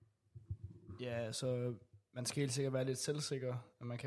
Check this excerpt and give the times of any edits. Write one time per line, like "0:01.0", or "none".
none